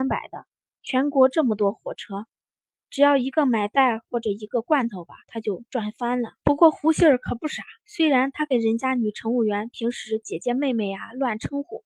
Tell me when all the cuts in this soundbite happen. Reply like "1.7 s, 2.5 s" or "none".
5.2 s, 5.7 s, 6.4 s, 7.8 s

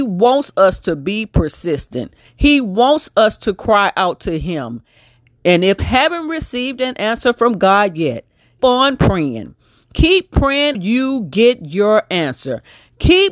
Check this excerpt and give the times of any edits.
5.8 s, 8.6 s, 10.7 s

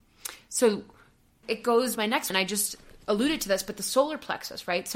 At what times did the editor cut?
1.4 s, 1.9 s, 2.3 s

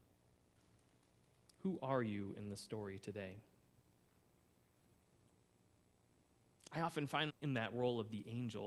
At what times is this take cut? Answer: 7.3 s

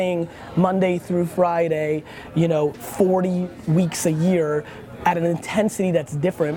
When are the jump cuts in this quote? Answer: none

